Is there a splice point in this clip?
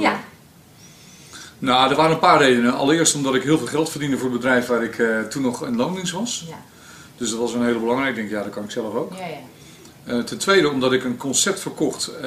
no; 0 cuts

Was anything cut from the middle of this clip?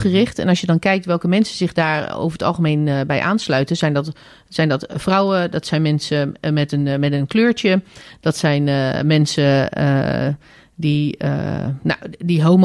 no; 0 cuts

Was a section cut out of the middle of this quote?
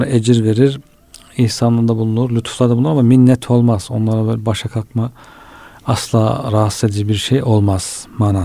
no; 0 cuts

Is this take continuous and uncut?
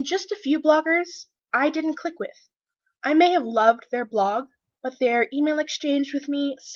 yes; 0 cuts

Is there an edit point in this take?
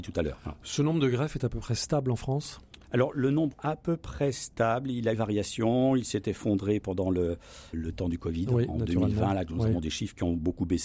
yes; 4 cuts; at 2.8 s, 3.5 s, 5.1 s, 7.7 s

